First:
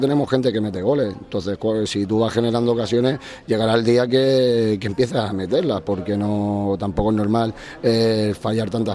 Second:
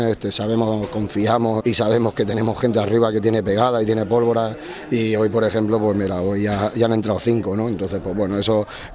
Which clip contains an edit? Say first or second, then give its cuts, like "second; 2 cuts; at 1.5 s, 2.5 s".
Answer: second; 1 cut; at 1.6 s